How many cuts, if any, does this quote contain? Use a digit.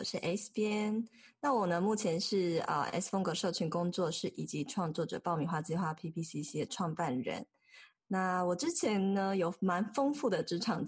0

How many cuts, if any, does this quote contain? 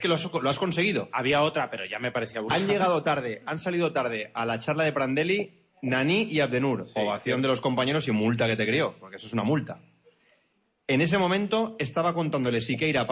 0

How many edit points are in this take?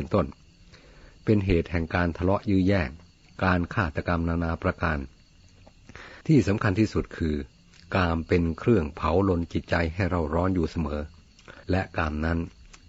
2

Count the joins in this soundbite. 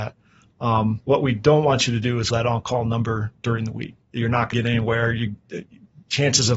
5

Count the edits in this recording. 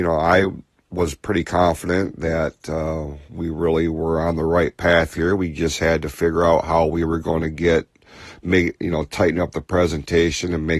1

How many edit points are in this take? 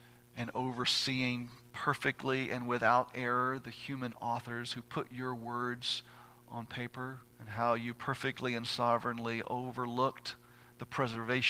1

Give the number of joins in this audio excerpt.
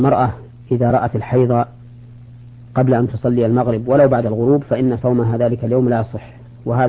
0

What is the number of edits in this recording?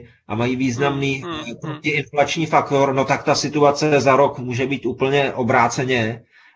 0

